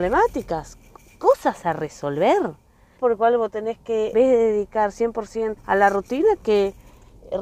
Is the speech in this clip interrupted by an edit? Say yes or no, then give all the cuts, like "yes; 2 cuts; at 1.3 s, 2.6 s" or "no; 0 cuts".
yes; 4 cuts; at 3.0 s, 4.1 s, 5.6 s, 6.4 s